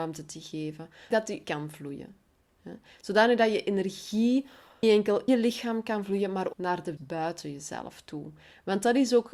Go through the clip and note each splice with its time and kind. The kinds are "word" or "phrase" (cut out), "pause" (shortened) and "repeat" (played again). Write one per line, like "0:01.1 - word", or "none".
0:01.1 - word
0:01.4 - word
0:04.8 - word
0:05.3 - word
0:06.5 - word
0:07.0 - word